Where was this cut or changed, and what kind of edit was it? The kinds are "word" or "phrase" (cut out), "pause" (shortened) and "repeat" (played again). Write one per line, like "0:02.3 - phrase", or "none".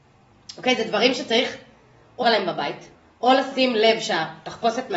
0:02.2 - word
0:02.9 - pause